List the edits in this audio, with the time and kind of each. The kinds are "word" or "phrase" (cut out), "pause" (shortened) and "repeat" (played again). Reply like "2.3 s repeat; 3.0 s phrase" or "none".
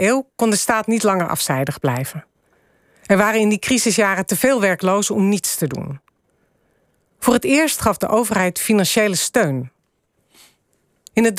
none